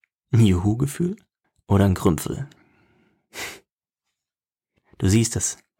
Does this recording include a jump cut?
yes; 1 cut; at 1.4 s

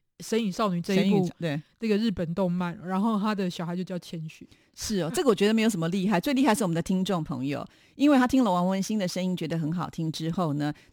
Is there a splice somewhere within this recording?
no; 0 cuts

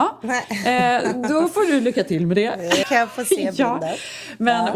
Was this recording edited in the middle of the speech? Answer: yes; 1 cut; at 2.8 s

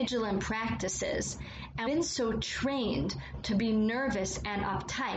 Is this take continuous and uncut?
no; 1 cut; at 1.9 s

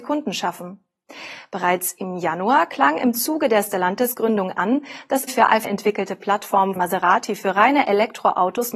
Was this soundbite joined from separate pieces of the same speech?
yes; 3 cuts; at 5.3 s, 5.6 s, 6.8 s

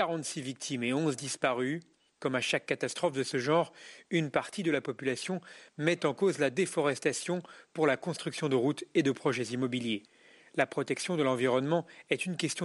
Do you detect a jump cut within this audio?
no; 0 cuts

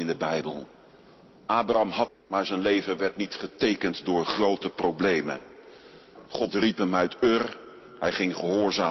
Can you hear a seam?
yes; 1 cut; at 2.1 s

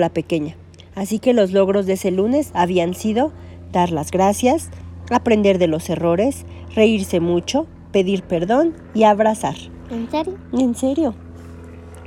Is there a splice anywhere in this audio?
no; 0 cuts

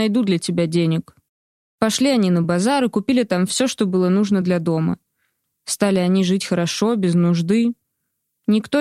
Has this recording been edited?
no; 0 cuts

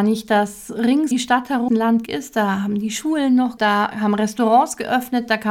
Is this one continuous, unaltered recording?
no; 4 cuts; at 1.1 s, 1.7 s, 2.1 s, 3.6 s

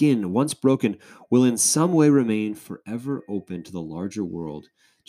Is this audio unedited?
yes; 0 cuts

